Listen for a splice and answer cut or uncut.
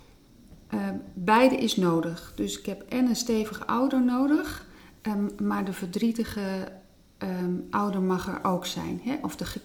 uncut